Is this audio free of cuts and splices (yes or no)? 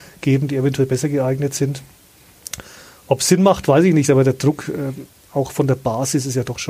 yes